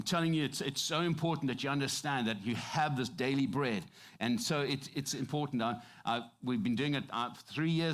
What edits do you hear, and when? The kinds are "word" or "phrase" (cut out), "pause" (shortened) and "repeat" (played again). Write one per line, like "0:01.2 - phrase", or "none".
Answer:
none